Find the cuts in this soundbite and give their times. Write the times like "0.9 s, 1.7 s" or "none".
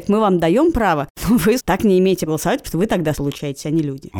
1.6 s, 2.3 s, 2.6 s, 3.1 s